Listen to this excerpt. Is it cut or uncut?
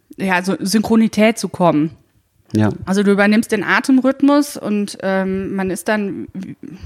uncut